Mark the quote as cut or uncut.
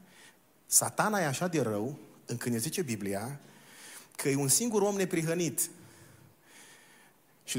uncut